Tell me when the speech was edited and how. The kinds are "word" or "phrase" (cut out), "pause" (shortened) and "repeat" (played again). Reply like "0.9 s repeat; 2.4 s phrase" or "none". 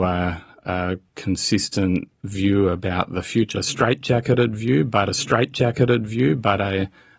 3.5 s word; 5.1 s repeat